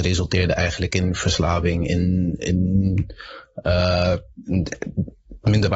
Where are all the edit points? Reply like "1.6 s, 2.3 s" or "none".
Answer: none